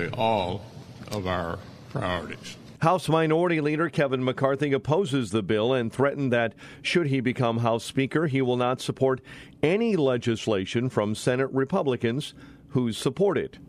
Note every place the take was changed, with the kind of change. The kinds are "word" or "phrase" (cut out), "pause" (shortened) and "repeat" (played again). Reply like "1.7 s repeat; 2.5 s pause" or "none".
2.8 s pause